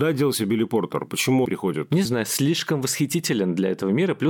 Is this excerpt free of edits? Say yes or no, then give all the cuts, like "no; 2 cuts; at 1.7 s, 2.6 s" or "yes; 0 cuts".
no; 2 cuts; at 1.4 s, 2.0 s